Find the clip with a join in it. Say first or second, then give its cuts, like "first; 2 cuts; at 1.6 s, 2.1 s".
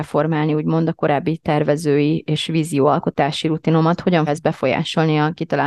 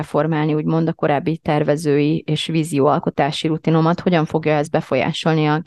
first; 1 cut; at 4.3 s